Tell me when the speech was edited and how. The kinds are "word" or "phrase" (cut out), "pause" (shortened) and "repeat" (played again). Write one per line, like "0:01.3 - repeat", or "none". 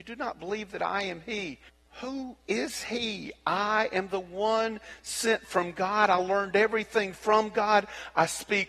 0:01.7 - pause